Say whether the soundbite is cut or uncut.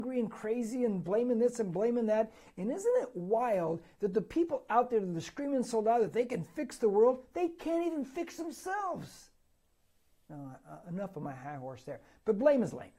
uncut